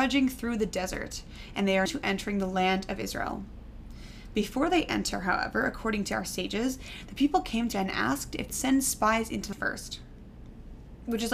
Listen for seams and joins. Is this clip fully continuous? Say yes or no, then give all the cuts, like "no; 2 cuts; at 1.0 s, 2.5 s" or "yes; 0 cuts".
no; 4 cuts; at 1.9 s, 7.7 s, 8.5 s, 9.5 s